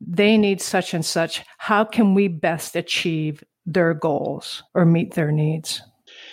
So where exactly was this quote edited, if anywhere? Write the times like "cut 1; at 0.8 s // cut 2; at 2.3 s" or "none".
cut 1; at 4.7 s